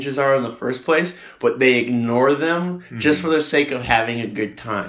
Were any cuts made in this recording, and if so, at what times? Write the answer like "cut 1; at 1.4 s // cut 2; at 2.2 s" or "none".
none